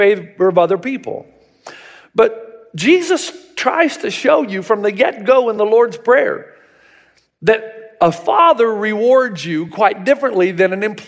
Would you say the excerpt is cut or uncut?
uncut